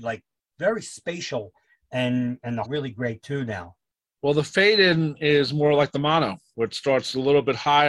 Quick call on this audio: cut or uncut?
cut